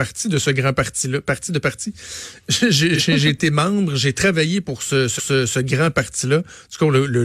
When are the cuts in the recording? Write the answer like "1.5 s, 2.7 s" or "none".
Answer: 5.2 s